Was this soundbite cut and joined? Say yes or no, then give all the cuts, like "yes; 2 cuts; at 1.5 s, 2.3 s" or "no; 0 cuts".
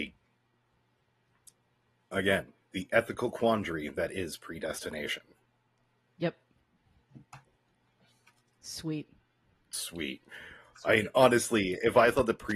no; 0 cuts